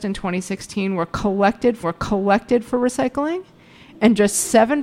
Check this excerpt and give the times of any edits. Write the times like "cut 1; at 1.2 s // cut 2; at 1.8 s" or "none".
cut 1; at 1.8 s